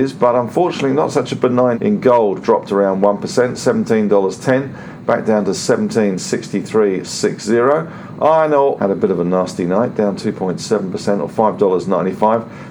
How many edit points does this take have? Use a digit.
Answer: 4